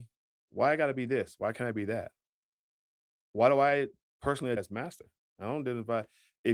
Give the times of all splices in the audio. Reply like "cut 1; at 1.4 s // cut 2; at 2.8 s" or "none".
cut 1; at 4.6 s